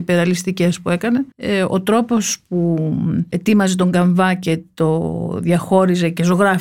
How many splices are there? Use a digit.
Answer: 1